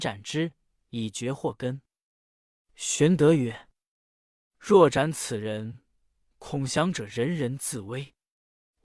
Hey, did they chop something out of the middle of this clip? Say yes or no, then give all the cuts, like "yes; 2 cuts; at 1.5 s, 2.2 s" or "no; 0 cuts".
no; 0 cuts